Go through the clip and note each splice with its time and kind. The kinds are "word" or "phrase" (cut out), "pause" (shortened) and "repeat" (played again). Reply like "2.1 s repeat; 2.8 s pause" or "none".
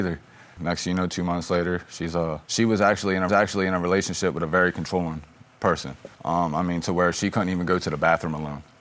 2.4 s pause; 3.3 s repeat; 6.1 s pause